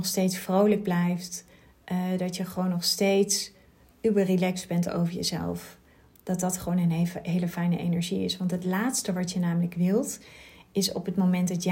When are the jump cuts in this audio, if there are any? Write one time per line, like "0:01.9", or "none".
none